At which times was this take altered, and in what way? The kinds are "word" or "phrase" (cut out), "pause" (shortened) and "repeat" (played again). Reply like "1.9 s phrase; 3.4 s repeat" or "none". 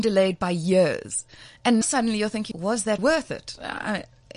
1.8 s word; 2.5 s word; 3.0 s word